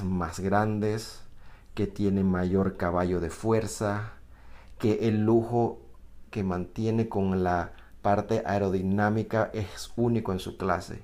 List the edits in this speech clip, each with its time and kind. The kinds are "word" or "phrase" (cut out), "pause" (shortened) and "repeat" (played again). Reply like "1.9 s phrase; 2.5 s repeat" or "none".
none